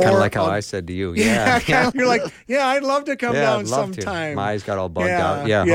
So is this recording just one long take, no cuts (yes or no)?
no